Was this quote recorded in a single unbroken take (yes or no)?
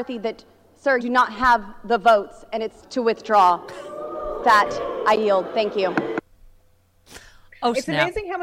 no